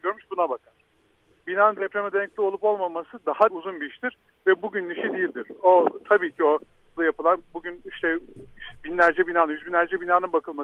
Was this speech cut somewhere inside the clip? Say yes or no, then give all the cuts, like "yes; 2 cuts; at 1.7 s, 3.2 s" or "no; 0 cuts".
yes; 2 cuts; at 3.5 s, 7.0 s